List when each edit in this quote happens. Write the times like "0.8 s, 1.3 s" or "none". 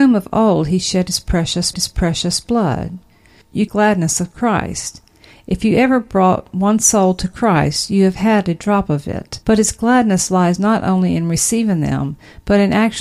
1.7 s, 3.7 s, 9.4 s